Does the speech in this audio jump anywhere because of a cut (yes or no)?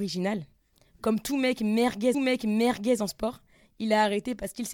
yes